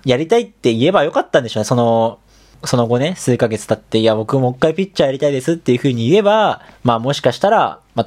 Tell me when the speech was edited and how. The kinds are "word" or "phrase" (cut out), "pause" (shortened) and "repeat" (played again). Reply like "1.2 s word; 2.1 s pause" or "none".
6.7 s pause

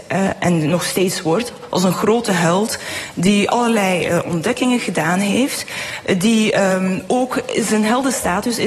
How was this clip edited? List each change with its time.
none

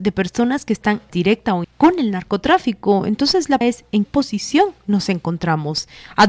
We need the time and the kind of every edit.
1.1 s word; 1.6 s word; 3.6 s word; 4.0 s word

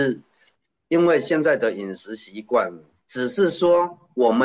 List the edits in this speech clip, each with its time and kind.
none

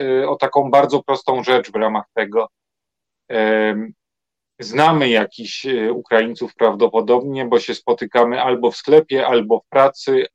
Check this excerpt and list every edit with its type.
1.0 s word

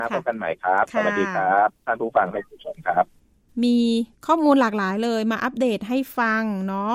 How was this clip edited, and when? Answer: 4.2 s pause

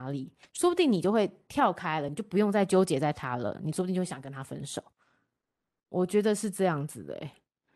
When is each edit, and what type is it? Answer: none

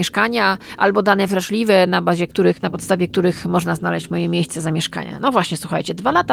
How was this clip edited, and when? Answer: none

